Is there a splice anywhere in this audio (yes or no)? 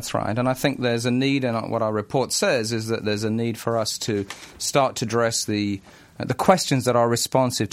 no